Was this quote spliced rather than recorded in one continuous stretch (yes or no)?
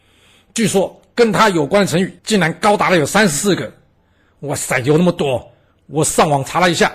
yes